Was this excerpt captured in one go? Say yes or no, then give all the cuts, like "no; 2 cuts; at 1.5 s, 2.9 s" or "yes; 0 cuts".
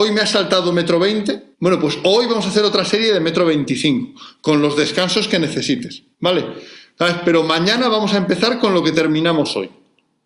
no; 2 cuts; at 1.5 s, 6.1 s